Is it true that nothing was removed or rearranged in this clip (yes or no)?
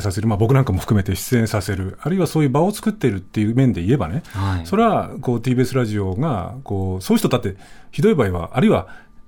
yes